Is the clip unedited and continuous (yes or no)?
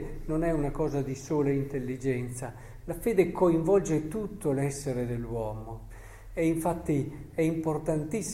yes